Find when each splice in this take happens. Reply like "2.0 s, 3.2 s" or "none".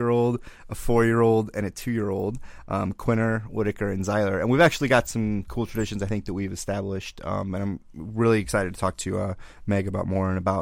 none